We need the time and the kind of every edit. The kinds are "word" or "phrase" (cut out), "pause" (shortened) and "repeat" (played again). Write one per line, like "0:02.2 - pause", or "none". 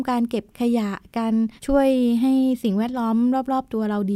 0:01.6 - pause